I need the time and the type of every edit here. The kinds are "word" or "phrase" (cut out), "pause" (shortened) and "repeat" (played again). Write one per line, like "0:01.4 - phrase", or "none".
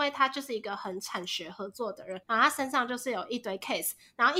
0:02.2 - pause